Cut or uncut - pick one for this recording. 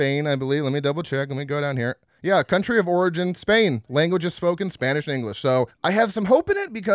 uncut